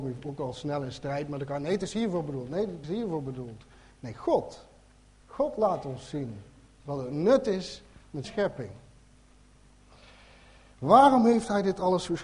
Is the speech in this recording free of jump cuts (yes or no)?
no